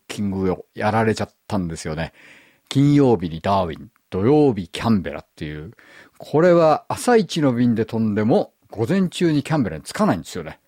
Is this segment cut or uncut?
cut